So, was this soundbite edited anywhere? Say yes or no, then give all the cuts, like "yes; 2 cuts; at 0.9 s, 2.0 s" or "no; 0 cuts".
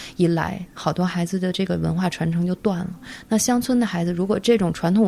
no; 0 cuts